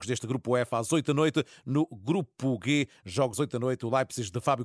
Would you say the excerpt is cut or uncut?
cut